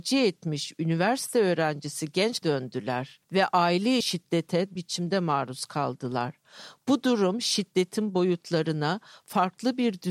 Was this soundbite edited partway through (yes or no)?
yes